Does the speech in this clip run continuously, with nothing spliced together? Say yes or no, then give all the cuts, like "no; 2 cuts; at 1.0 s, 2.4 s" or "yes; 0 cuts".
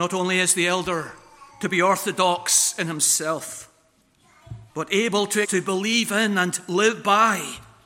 no; 3 cuts; at 1.5 s, 4.7 s, 5.4 s